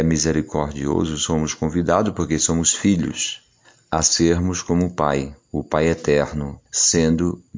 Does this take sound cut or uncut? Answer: cut